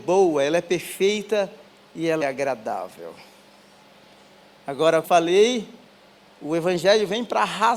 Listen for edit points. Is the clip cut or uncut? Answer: cut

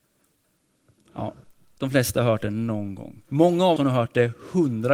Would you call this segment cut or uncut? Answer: cut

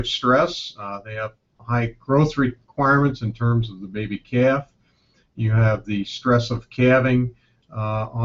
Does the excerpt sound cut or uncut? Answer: uncut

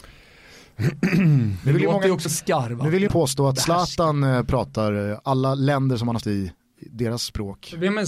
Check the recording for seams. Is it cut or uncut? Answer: cut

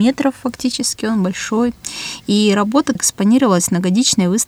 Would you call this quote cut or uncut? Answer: cut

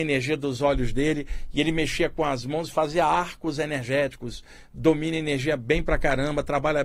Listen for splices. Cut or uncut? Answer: uncut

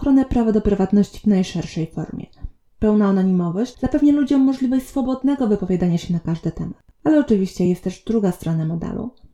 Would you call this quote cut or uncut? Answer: uncut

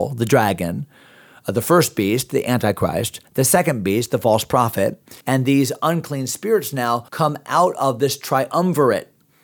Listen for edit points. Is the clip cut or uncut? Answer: cut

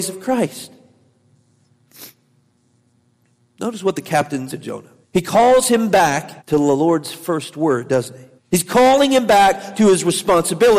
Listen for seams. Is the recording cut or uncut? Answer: cut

